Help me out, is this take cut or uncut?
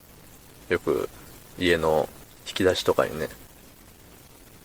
cut